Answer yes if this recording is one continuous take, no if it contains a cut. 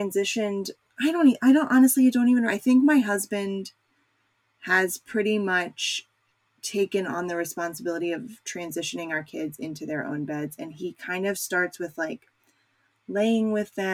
no